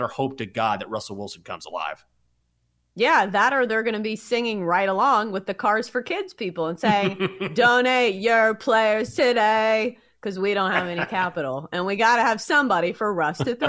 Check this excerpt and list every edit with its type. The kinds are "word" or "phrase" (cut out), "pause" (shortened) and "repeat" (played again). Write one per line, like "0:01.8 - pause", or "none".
none